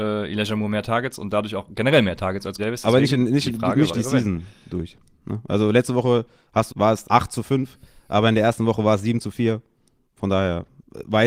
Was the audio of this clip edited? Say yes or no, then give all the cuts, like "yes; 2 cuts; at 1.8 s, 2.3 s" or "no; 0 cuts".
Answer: yes; 4 cuts; at 2.6 s, 3.9 s, 6.7 s, 7.0 s